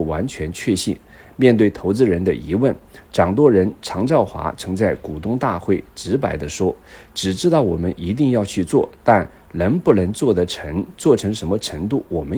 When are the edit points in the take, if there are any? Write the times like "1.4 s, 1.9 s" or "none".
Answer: none